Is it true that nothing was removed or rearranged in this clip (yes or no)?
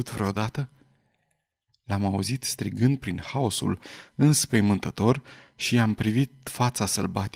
yes